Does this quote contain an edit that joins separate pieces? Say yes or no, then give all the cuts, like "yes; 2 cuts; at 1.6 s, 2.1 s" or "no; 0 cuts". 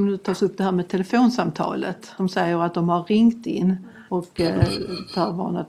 yes; 2 cuts; at 2.2 s, 4.1 s